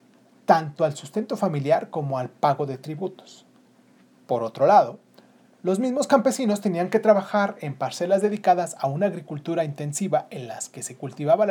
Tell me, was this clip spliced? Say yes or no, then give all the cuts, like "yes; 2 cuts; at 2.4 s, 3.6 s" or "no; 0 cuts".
no; 0 cuts